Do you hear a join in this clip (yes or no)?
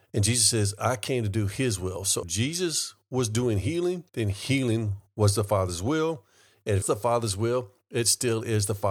yes